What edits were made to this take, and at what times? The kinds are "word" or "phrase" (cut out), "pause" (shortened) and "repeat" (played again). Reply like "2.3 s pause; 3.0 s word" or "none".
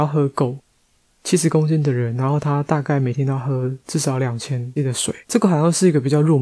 4.8 s word; 5.2 s pause